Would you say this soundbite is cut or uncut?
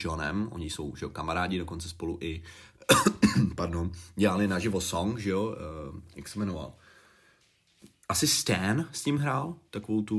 uncut